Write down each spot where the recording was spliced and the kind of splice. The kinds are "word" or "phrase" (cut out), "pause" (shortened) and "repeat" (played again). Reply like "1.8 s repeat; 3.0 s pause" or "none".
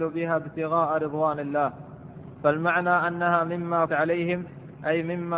3.9 s word